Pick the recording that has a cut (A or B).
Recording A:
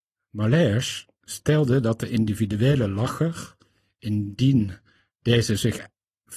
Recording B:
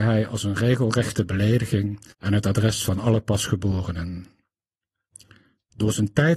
B